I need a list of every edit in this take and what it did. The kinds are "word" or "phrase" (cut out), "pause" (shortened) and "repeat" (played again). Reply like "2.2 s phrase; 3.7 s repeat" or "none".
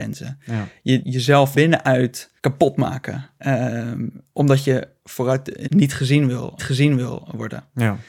1.0 s phrase; 1.5 s word; 2.4 s pause; 3.4 s pause; 5.6 s phrase; 6.6 s repeat